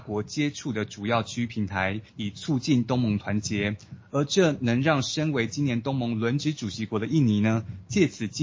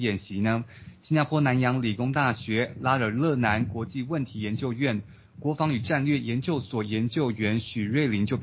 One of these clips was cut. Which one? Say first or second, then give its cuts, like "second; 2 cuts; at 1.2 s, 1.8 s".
first; 1 cut; at 2.1 s